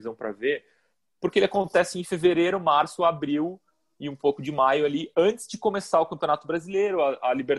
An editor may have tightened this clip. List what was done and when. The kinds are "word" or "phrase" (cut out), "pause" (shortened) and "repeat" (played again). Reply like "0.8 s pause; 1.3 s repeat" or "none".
none